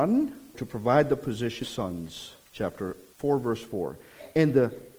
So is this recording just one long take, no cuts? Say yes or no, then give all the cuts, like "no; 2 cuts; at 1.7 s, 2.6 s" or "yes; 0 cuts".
no; 1 cut; at 1.6 s